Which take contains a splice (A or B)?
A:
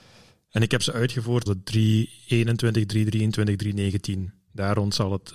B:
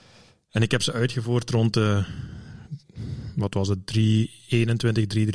A